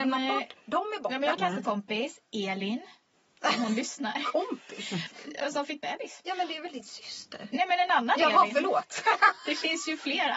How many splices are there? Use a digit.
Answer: 3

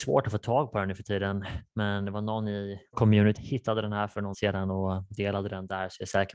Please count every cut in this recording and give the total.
3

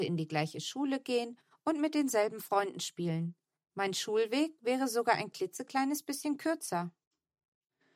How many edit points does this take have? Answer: 0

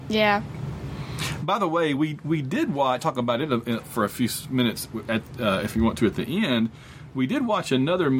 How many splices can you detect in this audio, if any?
1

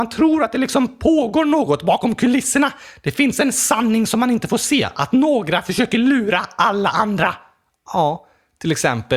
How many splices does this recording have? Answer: 0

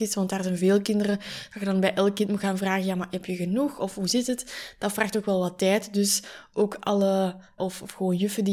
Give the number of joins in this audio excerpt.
1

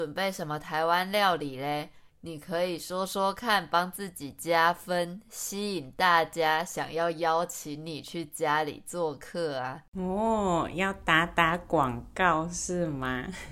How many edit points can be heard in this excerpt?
1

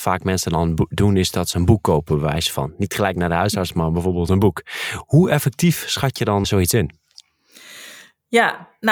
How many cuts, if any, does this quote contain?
1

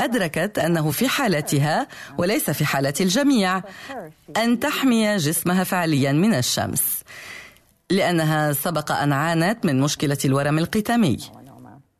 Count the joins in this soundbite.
0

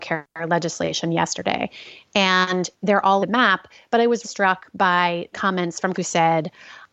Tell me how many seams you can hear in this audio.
5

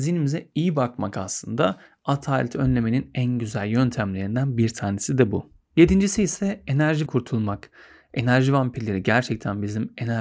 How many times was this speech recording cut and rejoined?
1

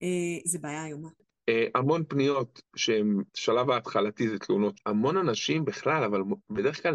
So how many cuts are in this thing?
3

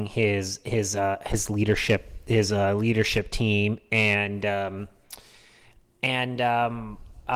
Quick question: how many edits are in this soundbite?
0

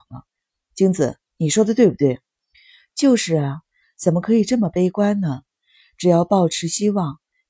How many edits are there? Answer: 0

